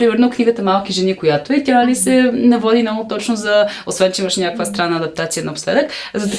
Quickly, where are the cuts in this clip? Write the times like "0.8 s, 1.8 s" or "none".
none